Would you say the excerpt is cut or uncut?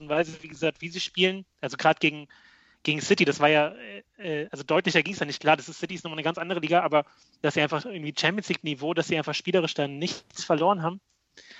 cut